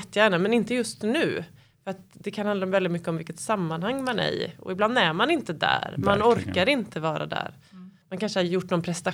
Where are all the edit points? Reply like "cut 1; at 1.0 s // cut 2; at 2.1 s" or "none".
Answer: none